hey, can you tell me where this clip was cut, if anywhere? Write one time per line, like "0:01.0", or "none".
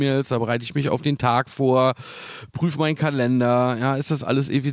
none